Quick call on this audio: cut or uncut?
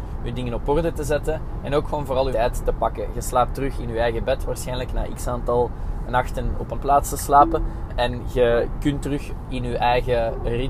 cut